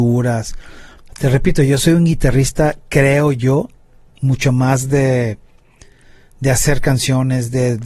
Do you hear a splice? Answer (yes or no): no